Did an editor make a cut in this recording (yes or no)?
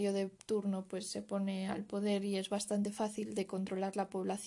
no